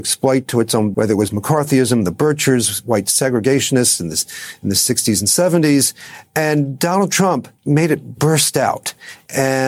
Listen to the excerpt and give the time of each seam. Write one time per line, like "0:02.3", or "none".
0:00.9
0:07.6

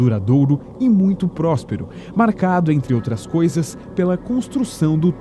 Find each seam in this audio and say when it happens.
none

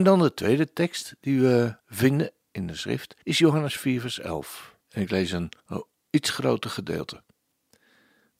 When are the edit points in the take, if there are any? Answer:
0:01.8
0:03.2
0:04.8
0:05.6

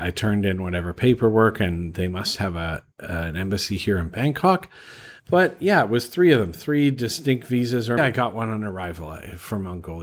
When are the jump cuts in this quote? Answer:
0:05.2
0:08.0

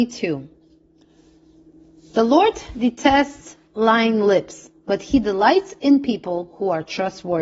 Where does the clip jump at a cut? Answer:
none

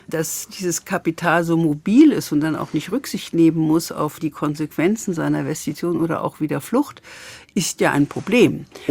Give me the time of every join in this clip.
none

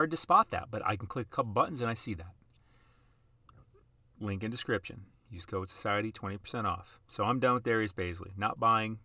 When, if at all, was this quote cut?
none

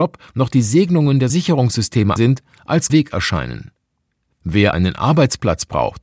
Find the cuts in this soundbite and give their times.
0:01.3
0:02.2
0:02.9
0:04.7

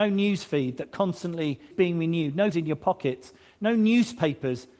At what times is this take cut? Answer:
0:01.7
0:02.5

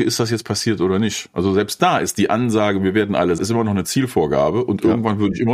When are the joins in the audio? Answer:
0:03.4

